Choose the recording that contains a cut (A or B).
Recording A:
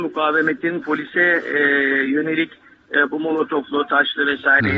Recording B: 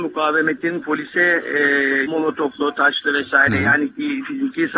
B